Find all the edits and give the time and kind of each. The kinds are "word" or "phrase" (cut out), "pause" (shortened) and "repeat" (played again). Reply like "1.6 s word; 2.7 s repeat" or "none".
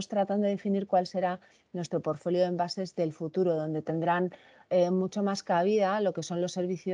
none